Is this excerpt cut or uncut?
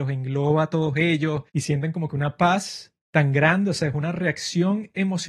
cut